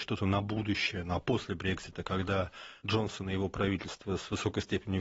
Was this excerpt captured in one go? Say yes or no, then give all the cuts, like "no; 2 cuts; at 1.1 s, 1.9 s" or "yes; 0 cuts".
no; 1 cut; at 2.8 s